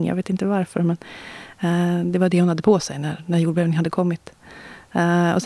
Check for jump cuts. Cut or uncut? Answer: uncut